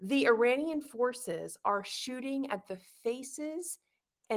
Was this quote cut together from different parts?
no; 0 cuts

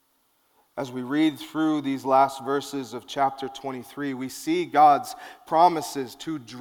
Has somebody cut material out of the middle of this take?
no; 0 cuts

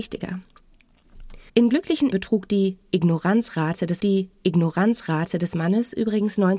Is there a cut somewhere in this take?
yes; 3 cuts; at 1.5 s, 2.1 s, 4.0 s

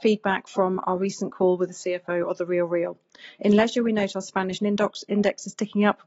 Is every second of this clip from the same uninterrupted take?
no; 1 cut; at 4.6 s

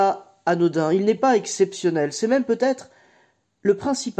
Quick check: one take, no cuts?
yes; 0 cuts

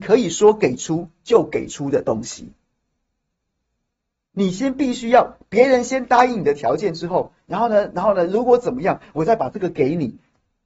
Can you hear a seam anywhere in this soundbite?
no; 0 cuts

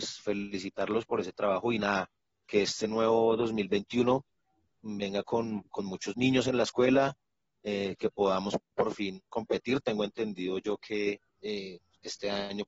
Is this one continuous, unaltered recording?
no; 1 cut; at 11.3 s

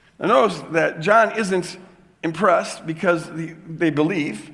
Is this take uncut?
yes; 0 cuts

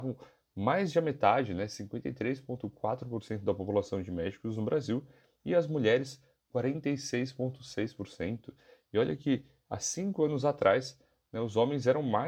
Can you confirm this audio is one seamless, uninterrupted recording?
yes; 0 cuts

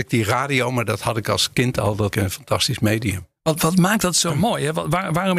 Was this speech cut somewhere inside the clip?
yes; 1 cut; at 2.1 s

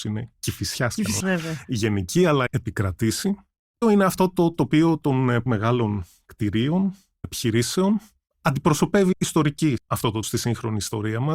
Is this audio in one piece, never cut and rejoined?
no; 8 cuts; at 1.2 s, 2.5 s, 3.8 s, 5.5 s, 7.2 s, 9.1 s, 9.8 s, 10.2 s

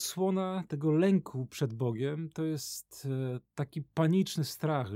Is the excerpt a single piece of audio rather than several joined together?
yes; 0 cuts

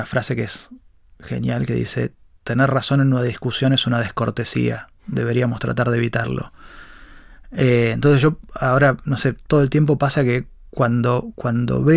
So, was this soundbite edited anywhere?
no; 0 cuts

